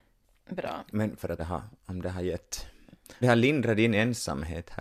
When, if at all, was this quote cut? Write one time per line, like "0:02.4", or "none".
0:01.4
0:01.8
0:03.2

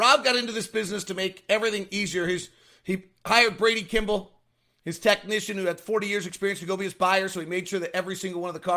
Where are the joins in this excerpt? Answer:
none

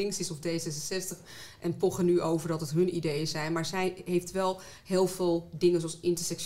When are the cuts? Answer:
none

